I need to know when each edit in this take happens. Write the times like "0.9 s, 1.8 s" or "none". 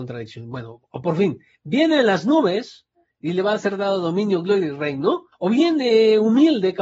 5.3 s